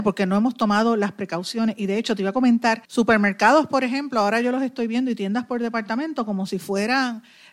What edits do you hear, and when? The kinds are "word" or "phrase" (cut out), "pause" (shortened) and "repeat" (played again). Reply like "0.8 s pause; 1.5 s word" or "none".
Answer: 2.8 s pause